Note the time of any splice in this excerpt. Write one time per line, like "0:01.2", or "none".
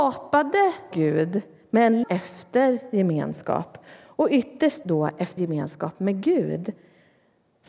0:00.9
0:02.0
0:04.8
0:05.4

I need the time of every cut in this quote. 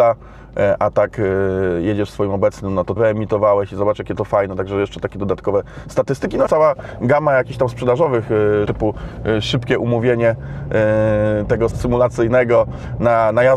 0:03.0
0:06.5
0:08.6
0:11.7

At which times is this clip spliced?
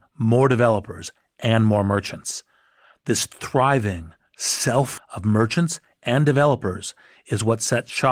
0:05.0

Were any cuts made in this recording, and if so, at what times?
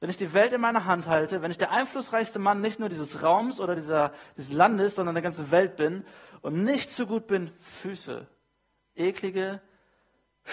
none

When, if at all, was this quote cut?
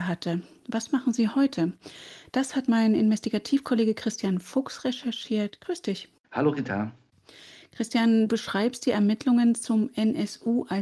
0:08.3

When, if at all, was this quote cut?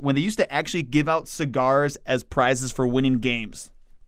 none

